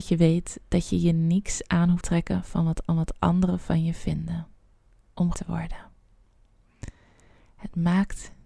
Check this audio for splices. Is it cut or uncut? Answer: cut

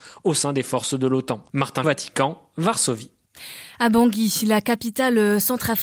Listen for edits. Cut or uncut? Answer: cut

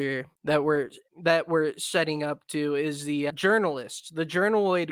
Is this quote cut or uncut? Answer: cut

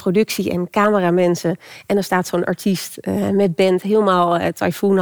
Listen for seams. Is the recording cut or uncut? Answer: uncut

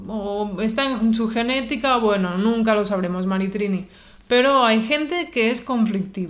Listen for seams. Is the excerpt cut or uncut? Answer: uncut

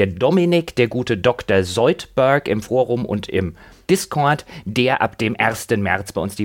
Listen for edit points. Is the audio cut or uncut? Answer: uncut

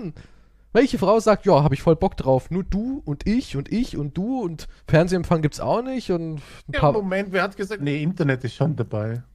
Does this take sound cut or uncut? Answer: cut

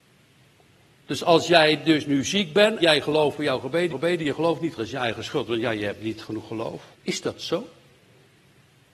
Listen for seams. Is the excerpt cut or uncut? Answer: cut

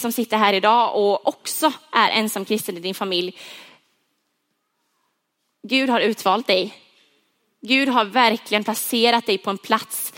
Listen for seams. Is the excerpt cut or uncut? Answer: uncut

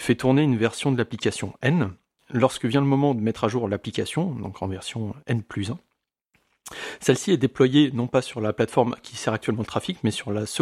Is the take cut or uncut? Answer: uncut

